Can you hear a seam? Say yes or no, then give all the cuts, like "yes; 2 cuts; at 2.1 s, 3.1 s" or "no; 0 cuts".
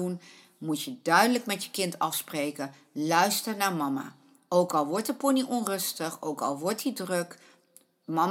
no; 0 cuts